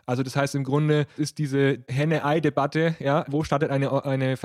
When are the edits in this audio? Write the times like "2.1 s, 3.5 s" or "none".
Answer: 1.2 s, 3.2 s